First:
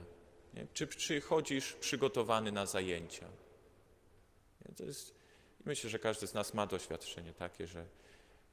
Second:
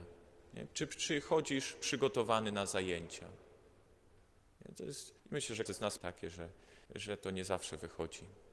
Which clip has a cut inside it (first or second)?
second